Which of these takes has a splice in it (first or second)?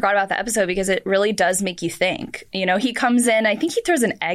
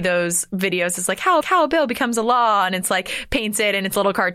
second